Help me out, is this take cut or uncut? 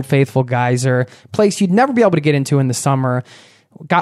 uncut